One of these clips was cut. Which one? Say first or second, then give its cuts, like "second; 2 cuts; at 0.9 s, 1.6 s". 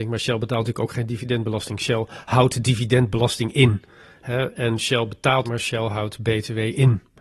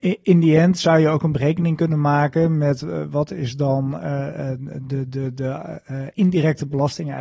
first; 1 cut; at 5.4 s